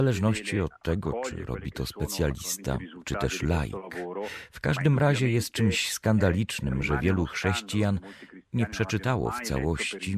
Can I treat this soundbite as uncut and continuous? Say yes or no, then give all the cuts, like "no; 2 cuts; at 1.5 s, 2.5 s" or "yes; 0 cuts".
yes; 0 cuts